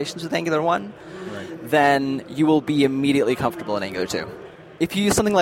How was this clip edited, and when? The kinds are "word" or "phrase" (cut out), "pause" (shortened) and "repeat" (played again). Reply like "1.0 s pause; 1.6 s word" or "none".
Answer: none